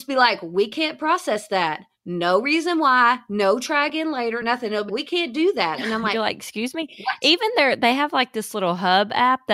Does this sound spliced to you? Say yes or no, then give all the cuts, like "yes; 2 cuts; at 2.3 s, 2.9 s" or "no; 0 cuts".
yes; 1 cut; at 4.9 s